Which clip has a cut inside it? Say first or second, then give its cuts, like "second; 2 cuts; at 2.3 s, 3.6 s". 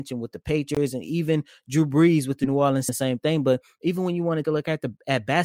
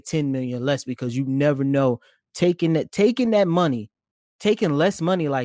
first; 2 cuts; at 2.9 s, 4.4 s